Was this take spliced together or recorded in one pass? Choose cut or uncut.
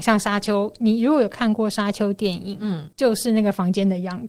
cut